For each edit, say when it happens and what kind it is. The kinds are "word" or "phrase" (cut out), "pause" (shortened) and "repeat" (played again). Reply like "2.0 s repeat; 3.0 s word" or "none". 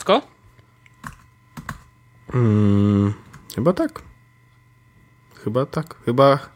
3.4 s pause